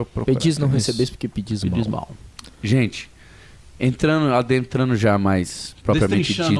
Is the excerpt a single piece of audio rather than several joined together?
yes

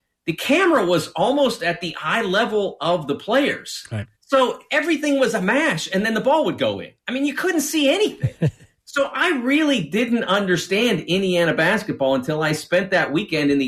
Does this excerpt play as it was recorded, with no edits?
no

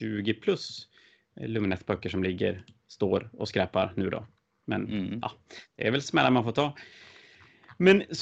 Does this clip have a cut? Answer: no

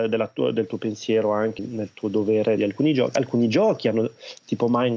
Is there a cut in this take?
yes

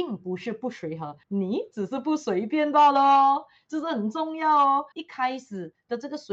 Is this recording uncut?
no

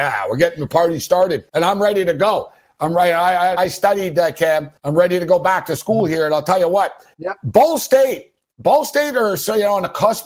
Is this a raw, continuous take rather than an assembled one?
no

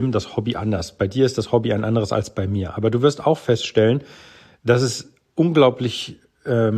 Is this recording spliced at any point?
no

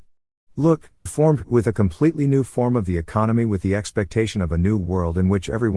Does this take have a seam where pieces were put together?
yes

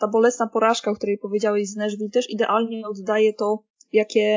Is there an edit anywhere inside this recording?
no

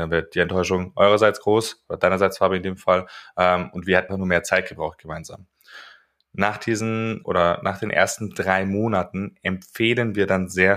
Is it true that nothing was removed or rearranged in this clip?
no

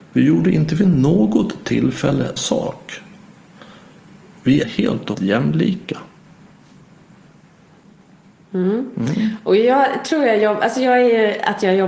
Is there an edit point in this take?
yes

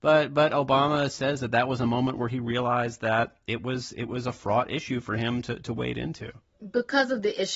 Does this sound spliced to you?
no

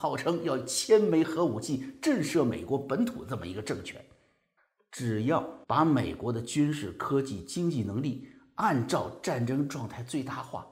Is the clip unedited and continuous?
no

